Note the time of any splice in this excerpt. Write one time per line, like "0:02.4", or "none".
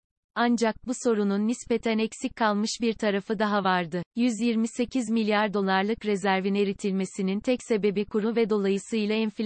0:04.1